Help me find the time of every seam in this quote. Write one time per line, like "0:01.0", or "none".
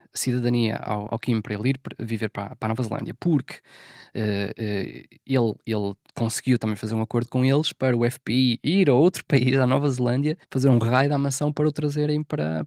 0:10.4